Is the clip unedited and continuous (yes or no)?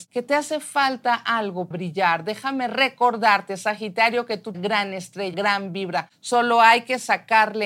no